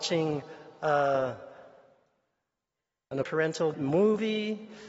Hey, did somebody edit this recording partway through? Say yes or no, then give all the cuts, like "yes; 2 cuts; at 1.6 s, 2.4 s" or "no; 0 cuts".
yes; 2 cuts; at 3.2 s, 3.7 s